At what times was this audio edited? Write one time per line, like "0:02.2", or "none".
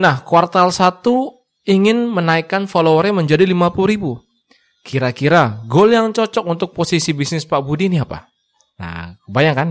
none